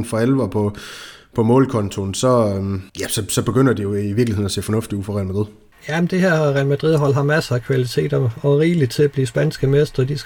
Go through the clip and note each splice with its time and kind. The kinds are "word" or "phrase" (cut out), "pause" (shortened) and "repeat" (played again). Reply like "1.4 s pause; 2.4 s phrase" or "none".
2.9 s pause; 5.7 s pause